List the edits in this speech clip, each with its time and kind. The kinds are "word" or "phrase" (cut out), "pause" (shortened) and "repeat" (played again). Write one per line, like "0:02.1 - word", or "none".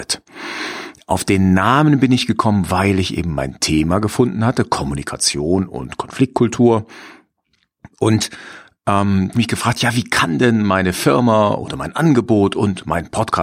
0:09.3 - phrase